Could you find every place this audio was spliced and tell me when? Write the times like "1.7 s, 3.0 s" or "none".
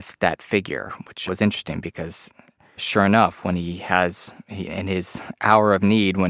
1.3 s, 2.8 s